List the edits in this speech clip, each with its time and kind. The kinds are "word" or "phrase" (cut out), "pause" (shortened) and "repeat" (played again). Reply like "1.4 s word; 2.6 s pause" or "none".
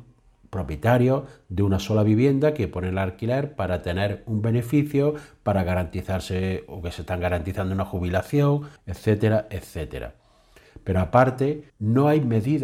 8.8 s pause; 11.7 s pause